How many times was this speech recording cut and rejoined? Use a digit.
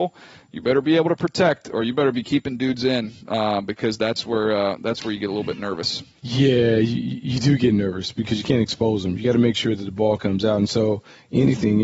1